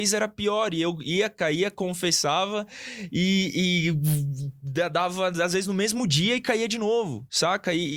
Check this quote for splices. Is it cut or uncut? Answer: uncut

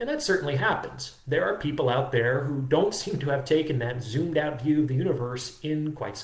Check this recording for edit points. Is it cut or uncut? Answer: uncut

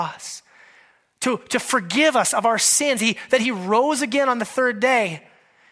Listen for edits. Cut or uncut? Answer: uncut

